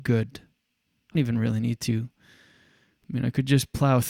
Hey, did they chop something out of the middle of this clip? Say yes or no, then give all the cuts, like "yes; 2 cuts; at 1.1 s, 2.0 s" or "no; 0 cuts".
yes; 1 cut; at 1.1 s